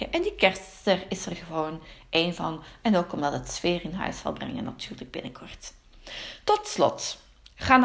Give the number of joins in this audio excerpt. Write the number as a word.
zero